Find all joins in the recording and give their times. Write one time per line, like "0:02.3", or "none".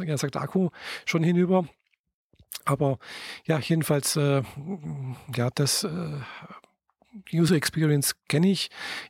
none